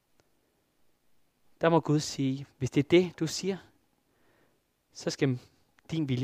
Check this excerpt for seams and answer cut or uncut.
uncut